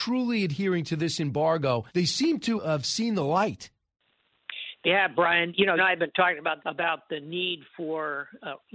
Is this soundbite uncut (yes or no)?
no